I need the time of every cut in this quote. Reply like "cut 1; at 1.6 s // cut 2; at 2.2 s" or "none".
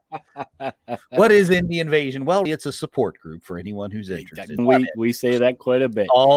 cut 1; at 2.5 s // cut 2; at 4.6 s